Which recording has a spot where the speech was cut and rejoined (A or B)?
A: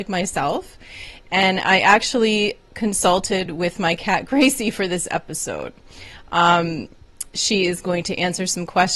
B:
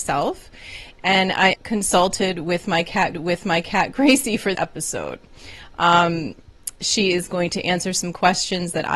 B